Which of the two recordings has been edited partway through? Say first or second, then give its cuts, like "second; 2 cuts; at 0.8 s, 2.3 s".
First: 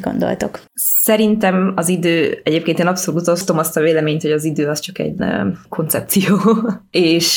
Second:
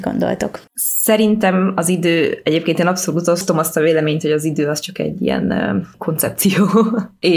first; 1 cut; at 5.2 s